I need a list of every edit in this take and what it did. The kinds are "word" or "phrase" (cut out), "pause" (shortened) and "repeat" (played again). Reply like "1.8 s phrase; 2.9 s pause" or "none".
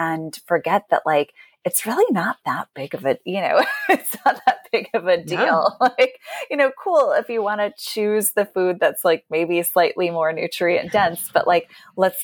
none

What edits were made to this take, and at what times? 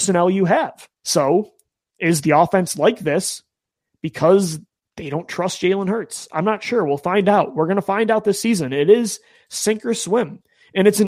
1.0 s pause

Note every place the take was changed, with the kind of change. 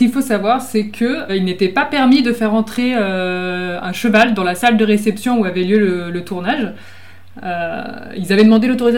1.3 s word

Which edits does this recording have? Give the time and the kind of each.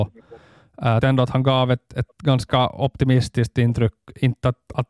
1.0 s word

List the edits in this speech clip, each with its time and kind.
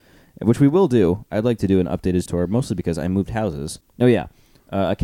2.3 s word

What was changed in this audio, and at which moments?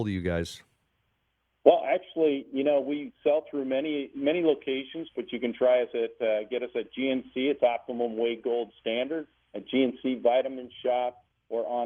none

